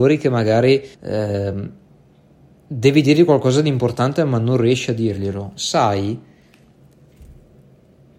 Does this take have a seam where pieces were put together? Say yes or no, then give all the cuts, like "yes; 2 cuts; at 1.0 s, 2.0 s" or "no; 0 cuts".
yes; 1 cut; at 0.9 s